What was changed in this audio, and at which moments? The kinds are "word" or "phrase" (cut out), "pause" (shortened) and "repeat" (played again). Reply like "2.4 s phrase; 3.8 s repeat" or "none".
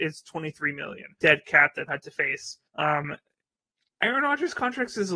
1.2 s word; 1.9 s word; 2.7 s pause